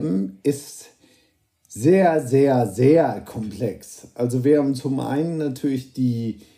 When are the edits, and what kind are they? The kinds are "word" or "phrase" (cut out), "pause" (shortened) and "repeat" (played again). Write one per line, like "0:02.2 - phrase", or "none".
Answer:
none